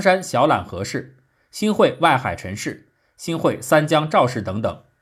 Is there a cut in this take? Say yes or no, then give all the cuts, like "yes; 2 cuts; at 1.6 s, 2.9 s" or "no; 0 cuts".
no; 0 cuts